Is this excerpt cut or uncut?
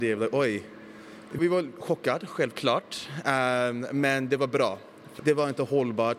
cut